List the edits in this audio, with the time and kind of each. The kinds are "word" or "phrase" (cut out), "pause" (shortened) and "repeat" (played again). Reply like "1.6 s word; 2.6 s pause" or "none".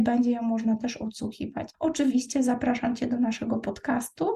1.7 s pause

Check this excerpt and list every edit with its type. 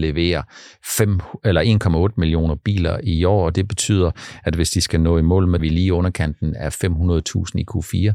5.6 s phrase

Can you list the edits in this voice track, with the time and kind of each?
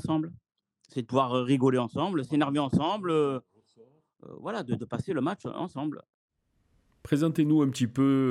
none

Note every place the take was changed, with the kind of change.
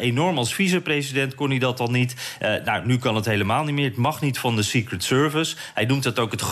none

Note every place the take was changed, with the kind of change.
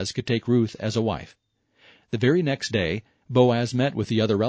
none

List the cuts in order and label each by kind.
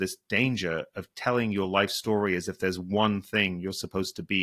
none

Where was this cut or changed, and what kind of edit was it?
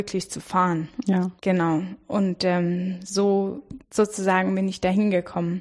1.4 s pause; 3.8 s pause

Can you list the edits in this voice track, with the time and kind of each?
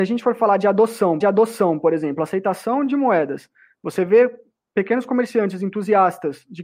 1.2 s repeat

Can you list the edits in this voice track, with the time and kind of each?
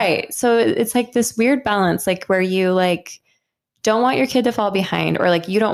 none

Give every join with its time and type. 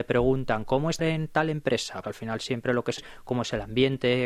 1.0 s word; 2.0 s word; 3.0 s word

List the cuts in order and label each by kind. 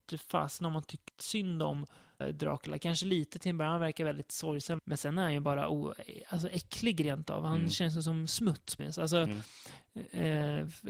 1.1 s phrase; 2.2 s word; 4.8 s word; 8.8 s word

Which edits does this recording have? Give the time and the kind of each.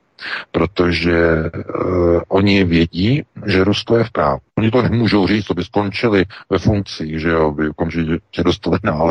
4.5 s pause

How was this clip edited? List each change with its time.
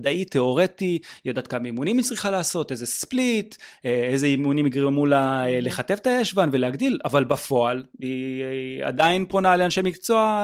7.9 s pause

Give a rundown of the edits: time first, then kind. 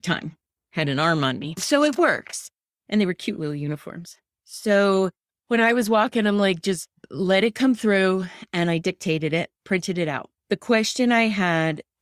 9.6 s pause; 10.4 s pause

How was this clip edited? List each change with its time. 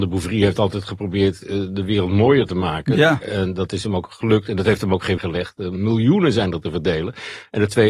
5.2 s word

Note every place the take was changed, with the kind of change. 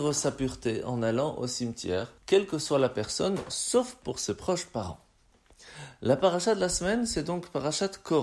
2.2 s pause

